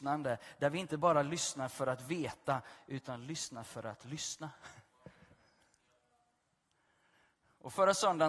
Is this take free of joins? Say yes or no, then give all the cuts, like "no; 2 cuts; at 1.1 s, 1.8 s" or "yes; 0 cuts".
yes; 0 cuts